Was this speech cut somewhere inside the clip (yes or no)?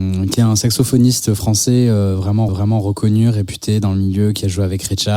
yes